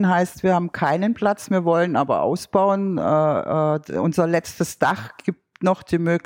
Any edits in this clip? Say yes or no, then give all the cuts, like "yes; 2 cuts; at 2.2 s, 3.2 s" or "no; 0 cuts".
no; 0 cuts